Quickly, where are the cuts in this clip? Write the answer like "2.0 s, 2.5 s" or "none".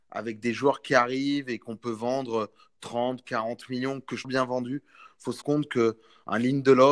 4.2 s, 5.4 s